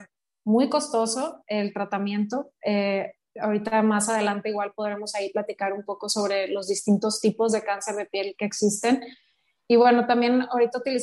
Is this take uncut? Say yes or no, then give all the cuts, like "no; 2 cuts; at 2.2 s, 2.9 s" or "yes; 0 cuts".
yes; 0 cuts